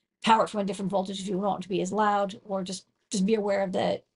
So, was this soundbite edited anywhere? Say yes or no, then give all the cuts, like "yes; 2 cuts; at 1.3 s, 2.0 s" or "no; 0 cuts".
no; 0 cuts